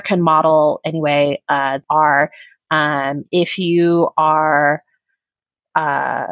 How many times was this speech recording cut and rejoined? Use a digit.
1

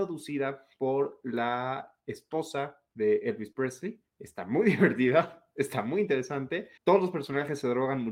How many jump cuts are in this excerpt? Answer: 2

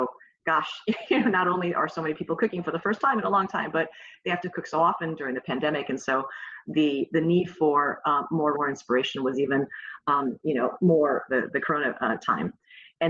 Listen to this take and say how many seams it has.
2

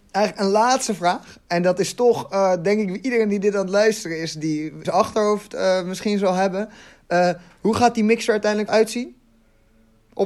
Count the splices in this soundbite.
2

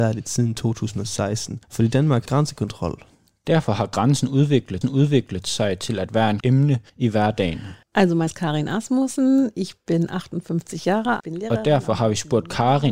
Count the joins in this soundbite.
9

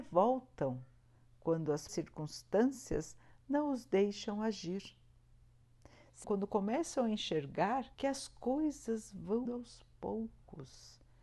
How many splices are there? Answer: 4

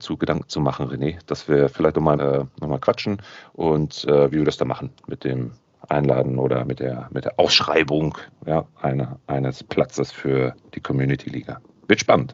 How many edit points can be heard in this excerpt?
1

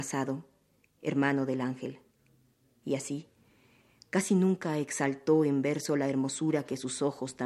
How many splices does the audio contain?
0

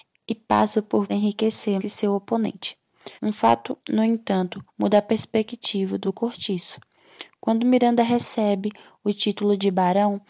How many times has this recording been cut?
6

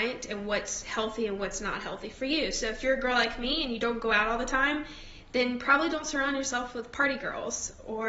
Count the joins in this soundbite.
0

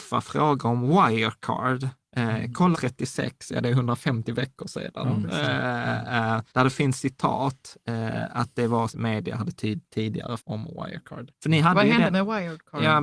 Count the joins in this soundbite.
5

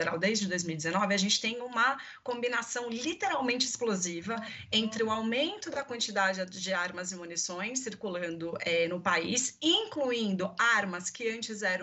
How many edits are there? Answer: 0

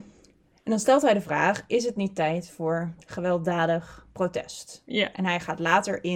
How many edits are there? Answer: 0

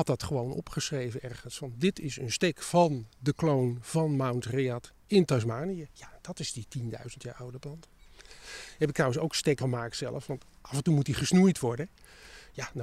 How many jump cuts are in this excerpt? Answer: 1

